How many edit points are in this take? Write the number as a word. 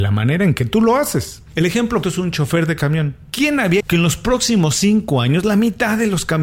two